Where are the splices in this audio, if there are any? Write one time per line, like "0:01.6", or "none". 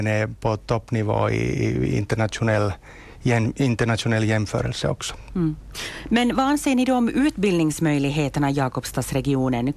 none